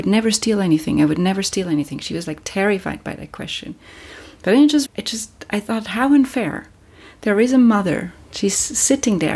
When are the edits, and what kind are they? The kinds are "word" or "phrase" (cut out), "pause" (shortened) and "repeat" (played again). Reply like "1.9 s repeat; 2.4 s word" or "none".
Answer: 4.9 s word